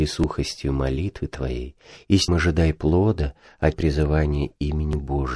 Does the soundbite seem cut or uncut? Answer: cut